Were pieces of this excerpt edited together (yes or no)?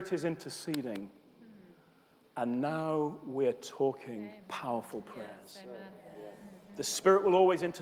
yes